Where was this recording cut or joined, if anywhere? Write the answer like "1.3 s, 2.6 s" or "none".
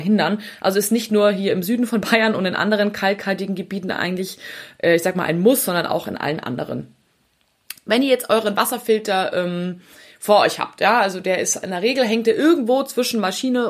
none